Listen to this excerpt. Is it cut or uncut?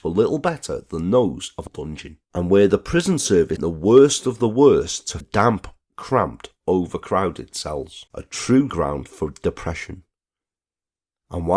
cut